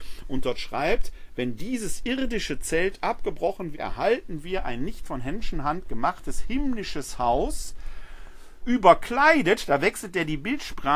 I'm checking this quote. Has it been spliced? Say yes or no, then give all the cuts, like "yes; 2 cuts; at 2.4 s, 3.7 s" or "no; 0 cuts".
yes; 2 cuts; at 3.7 s, 8.6 s